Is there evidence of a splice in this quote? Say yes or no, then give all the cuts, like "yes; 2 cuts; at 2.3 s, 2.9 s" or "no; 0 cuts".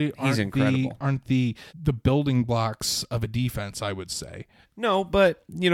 yes; 2 cuts; at 1.7 s, 4.6 s